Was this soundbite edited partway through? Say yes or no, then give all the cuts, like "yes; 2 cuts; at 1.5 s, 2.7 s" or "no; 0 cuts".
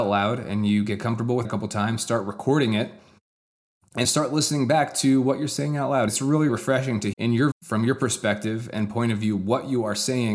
yes; 6 cuts; at 1.4 s, 4.0 s, 6.1 s, 6.5 s, 7.1 s, 7.5 s